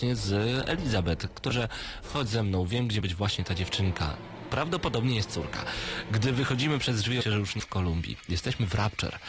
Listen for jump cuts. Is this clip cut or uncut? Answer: cut